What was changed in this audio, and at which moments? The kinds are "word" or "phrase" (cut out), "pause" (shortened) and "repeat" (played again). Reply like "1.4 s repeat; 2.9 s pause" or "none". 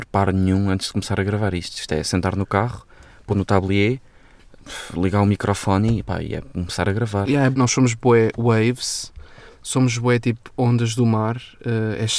3.3 s phrase; 7.5 s phrase

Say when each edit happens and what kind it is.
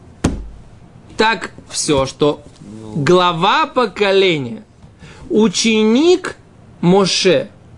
1.1 s word; 1.7 s word

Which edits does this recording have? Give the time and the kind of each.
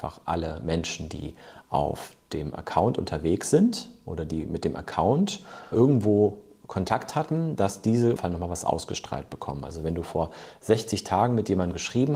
5.7 s word; 8.2 s phrase

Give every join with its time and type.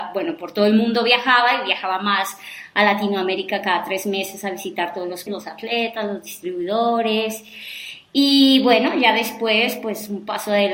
5.3 s word

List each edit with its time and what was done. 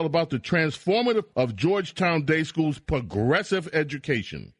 1.3 s word

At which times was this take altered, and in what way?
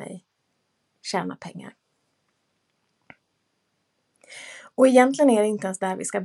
none

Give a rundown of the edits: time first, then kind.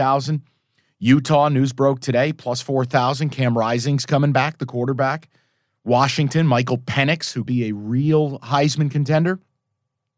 7.5 s word

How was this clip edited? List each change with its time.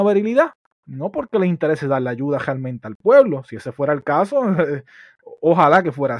none

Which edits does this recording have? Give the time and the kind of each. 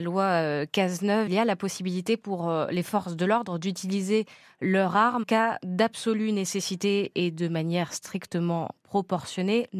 1.3 s word; 5.2 s word

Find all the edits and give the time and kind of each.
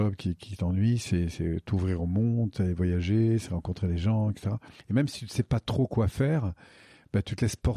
4.8 s pause

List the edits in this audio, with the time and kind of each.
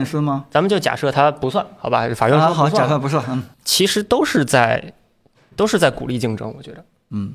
3.5 s pause

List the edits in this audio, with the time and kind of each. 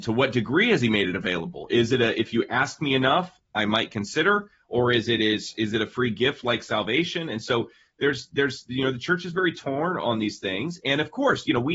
none

